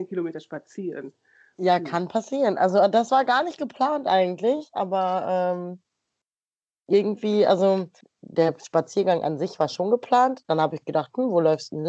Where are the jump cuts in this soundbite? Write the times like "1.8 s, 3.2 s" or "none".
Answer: 8.0 s